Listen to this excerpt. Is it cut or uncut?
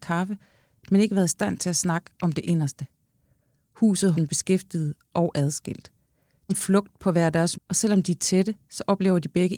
cut